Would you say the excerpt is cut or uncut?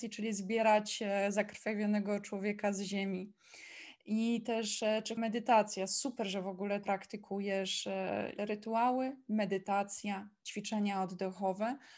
cut